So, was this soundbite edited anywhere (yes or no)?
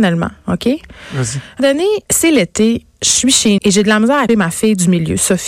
yes